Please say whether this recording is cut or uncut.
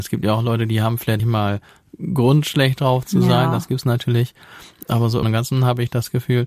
cut